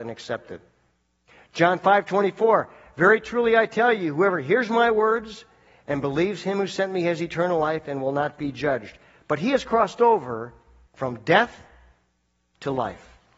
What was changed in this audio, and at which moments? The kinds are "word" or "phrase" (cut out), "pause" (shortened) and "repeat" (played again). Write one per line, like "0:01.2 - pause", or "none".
none